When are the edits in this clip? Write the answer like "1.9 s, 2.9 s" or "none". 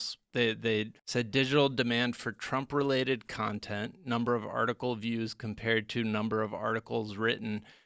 1.0 s